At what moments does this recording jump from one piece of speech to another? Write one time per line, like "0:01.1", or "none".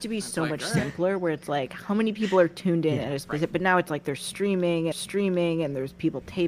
0:04.9